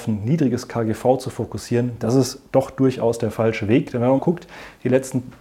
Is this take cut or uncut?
cut